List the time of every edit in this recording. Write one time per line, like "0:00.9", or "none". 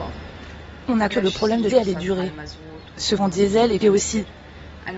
0:01.1
0:01.7
0:03.2
0:03.8